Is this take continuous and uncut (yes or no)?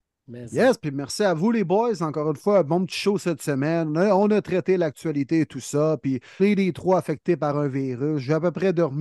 no